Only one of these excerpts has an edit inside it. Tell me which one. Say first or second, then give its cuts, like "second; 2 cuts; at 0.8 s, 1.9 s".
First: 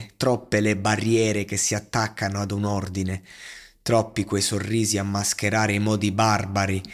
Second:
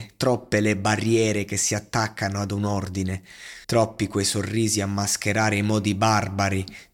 second; 1 cut; at 3.6 s